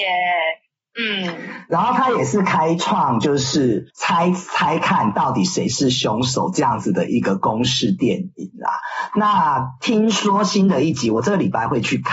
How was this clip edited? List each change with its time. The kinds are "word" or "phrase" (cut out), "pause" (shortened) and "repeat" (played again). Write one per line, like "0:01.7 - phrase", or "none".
0:03.9 - pause